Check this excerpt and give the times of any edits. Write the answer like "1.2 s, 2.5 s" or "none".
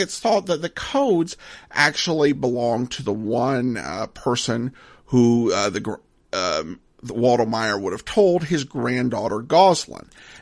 none